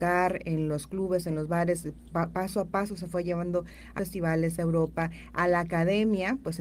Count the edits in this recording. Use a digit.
1